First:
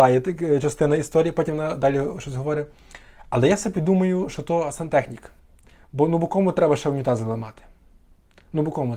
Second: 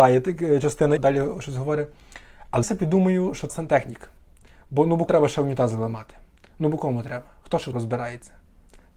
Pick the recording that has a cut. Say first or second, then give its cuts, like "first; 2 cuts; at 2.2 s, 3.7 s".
second; 6 cuts; at 1.0 s, 2.6 s, 3.5 s, 5.1 s, 6.4 s, 7.7 s